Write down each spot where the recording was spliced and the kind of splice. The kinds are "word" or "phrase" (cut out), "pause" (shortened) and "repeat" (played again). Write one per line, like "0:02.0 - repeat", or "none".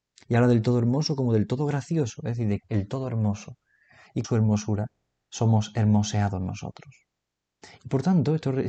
0:02.6 - word
0:04.2 - word